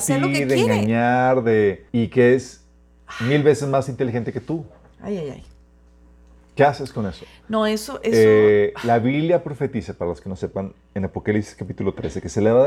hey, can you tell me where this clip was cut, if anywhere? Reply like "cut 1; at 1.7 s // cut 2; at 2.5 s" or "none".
cut 1; at 1.9 s